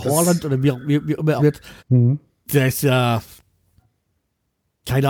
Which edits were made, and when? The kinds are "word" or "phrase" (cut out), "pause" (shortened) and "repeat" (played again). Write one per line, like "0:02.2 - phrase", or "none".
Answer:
0:01.4 - word
0:01.8 - pause